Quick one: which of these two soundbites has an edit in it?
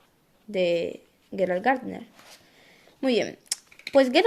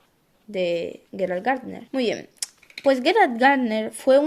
second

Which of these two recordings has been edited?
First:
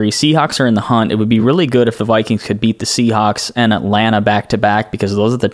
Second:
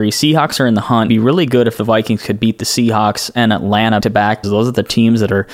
second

